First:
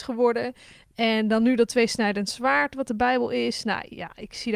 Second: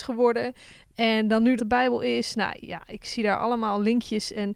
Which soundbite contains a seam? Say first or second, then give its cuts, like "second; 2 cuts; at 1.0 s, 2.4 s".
second; 1 cut; at 1.6 s